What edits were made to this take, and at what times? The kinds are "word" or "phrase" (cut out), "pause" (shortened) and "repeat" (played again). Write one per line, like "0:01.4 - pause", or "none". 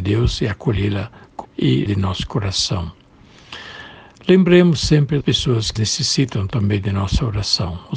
0:01.4 - word
0:01.9 - word
0:05.2 - word
0:05.8 - word